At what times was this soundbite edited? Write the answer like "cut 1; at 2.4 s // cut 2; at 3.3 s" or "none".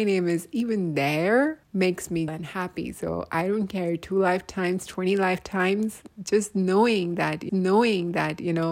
cut 1; at 1.6 s // cut 2; at 2.3 s // cut 3; at 7.5 s